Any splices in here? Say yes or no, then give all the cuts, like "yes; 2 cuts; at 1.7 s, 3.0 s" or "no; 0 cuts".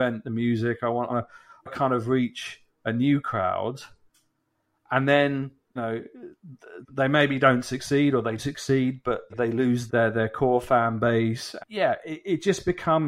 yes; 8 cuts; at 1.1 s, 1.7 s, 5.8 s, 6.8 s, 8.4 s, 9.3 s, 9.9 s, 11.6 s